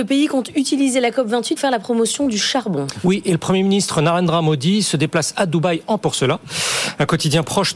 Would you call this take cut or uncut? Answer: cut